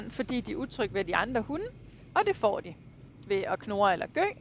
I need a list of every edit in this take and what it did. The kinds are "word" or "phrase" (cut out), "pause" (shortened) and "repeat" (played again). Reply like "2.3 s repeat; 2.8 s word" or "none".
none